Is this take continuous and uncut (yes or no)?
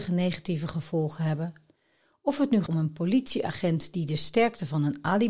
no